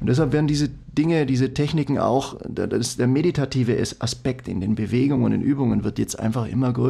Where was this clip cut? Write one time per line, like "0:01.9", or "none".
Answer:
none